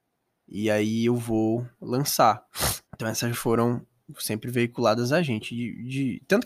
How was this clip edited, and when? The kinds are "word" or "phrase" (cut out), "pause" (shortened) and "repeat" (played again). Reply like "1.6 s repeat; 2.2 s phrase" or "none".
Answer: 2.8 s pause; 3.3 s word